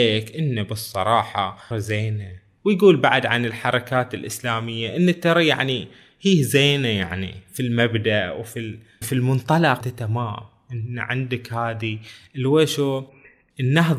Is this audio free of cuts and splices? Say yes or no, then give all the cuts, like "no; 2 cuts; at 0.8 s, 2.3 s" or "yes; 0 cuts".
no; 3 cuts; at 1.7 s, 9.0 s, 9.8 s